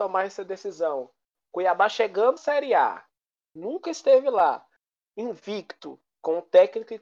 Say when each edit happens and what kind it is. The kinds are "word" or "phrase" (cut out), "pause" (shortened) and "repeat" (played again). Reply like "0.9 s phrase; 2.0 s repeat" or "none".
2.4 s word